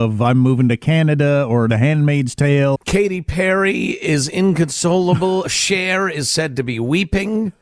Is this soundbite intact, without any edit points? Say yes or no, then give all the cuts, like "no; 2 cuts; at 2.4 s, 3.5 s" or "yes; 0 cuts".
no; 2 cuts; at 1.7 s, 2.8 s